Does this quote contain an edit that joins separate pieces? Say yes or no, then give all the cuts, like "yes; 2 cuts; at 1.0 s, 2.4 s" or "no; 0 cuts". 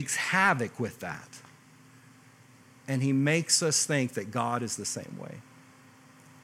no; 0 cuts